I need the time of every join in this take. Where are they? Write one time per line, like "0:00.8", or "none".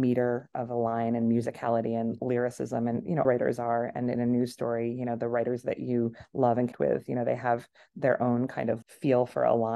0:03.2
0:06.7
0:08.8